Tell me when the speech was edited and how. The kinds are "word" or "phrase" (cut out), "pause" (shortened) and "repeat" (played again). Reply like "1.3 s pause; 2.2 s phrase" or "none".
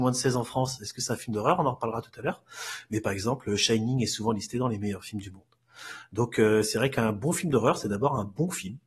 none